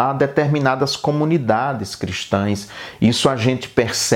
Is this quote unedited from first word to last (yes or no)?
yes